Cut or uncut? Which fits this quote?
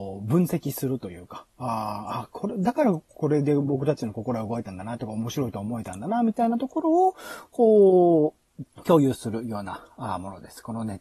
cut